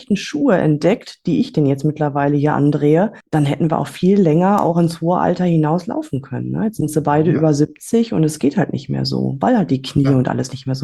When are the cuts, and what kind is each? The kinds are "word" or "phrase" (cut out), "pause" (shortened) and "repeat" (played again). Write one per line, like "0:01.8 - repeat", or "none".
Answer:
0:03.2 - pause